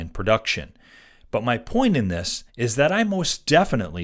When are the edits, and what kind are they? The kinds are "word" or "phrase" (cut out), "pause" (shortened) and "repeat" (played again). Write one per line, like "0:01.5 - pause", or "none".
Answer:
0:02.5 - pause